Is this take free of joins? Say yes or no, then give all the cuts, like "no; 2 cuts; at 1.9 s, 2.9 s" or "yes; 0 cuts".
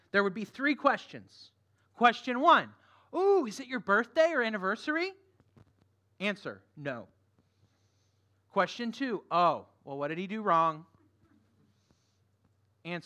yes; 0 cuts